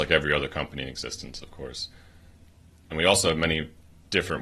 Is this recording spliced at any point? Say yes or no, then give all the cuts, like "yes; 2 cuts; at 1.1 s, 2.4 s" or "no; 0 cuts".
no; 0 cuts